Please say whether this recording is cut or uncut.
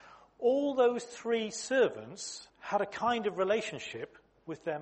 cut